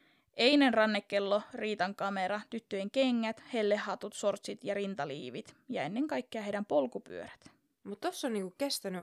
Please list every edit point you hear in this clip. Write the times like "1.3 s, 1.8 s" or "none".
none